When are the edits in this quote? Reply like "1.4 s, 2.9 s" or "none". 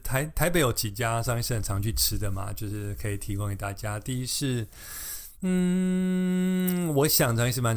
5.3 s